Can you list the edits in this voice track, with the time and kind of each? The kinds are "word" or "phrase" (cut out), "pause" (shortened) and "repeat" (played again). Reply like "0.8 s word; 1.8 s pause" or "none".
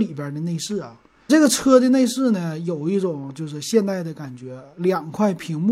1.3 s phrase

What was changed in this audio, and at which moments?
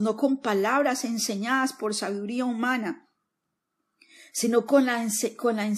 none

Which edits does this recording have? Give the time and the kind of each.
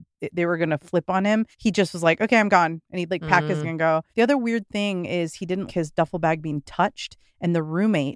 1.5 s pause; 3.6 s phrase; 4.1 s pause; 5.7 s word

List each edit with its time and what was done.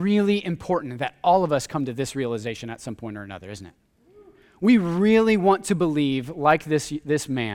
none

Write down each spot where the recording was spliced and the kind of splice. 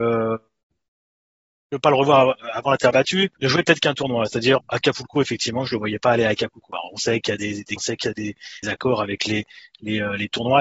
3.4 s pause; 4.6 s word; 7.8 s word; 8.6 s phrase

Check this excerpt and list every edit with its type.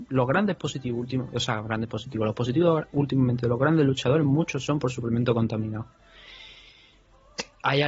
none

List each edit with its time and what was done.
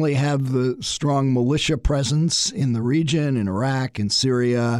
none

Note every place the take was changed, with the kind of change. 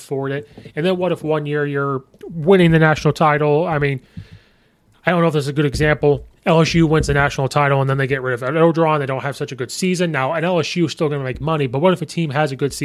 6.3 s pause

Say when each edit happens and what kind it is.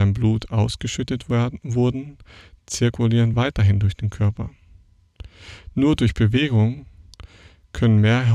none

